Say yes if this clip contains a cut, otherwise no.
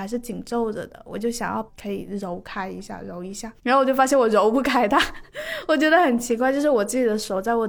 yes